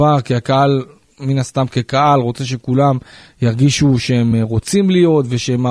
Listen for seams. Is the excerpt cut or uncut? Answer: uncut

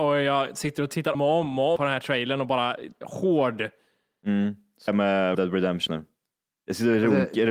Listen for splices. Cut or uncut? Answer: cut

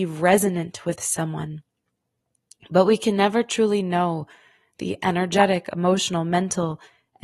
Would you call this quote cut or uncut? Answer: uncut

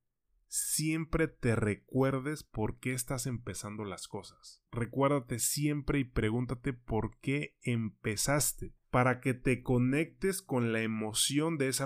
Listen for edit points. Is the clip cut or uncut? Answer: cut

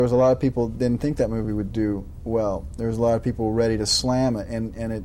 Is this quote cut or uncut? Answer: uncut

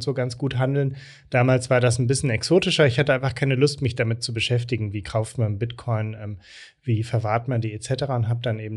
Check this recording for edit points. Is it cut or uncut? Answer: uncut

